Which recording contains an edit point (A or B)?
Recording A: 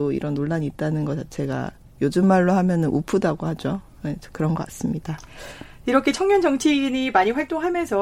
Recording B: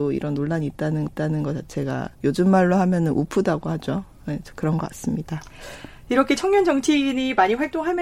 B